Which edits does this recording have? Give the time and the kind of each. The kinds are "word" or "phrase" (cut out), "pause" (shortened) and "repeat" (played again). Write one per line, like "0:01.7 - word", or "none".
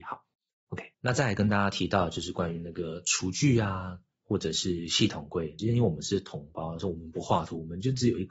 0:00.9 - pause